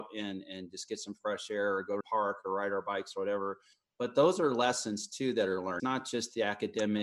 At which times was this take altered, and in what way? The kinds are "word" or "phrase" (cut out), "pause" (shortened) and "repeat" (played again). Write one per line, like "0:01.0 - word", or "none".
0:02.0 - phrase
0:03.7 - pause
0:05.8 - word